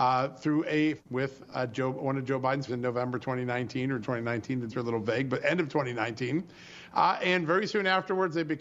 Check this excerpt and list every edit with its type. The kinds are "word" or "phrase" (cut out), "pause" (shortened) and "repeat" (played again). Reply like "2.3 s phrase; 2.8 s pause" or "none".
1.0 s word; 1.5 s word; 2.7 s word; 4.0 s word; 4.7 s word